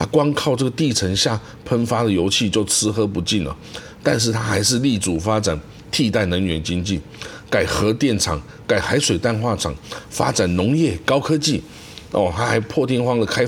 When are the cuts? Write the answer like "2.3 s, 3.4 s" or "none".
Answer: none

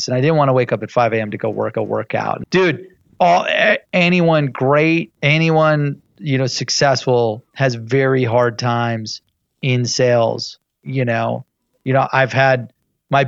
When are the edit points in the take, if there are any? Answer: 1.7 s, 2.4 s, 5.2 s, 7.5 s

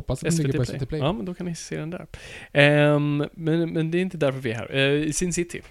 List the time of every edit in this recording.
none

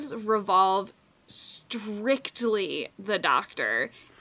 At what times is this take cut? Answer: 2.9 s

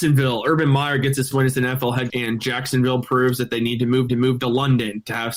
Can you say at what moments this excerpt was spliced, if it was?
1.3 s, 2.1 s, 4.1 s

